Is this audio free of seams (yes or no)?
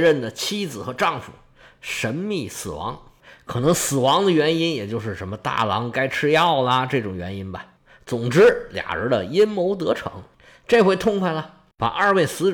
yes